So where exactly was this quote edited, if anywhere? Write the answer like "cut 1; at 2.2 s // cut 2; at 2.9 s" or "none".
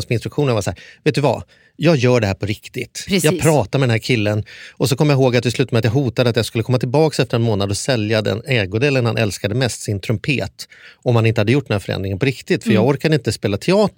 none